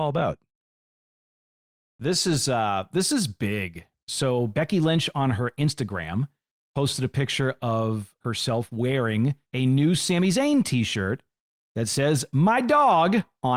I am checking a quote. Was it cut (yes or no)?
yes